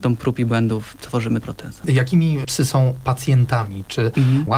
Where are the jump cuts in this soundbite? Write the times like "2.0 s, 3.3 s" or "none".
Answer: 1.4 s